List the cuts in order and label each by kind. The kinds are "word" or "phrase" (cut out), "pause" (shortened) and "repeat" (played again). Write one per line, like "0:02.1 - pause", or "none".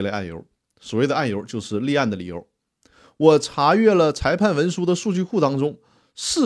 none